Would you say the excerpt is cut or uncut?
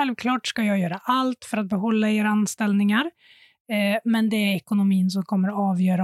uncut